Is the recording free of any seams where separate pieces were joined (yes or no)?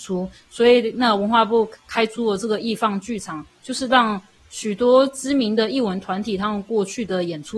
yes